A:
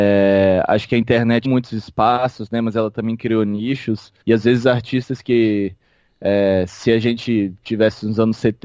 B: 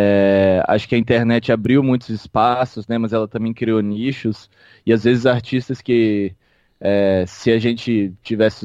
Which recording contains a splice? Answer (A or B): A